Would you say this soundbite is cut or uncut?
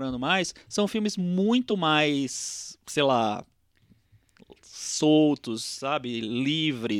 uncut